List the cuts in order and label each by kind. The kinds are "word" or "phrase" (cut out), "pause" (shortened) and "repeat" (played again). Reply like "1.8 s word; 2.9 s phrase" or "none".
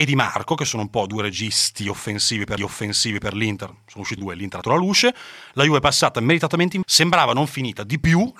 2.6 s repeat; 4.2 s word; 4.6 s word; 6.8 s word